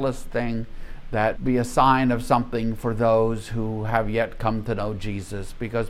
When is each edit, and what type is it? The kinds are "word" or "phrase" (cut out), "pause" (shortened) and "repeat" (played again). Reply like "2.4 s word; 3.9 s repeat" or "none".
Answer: 1.4 s word